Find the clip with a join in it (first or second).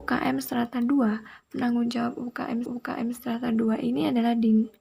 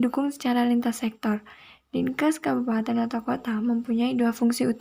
first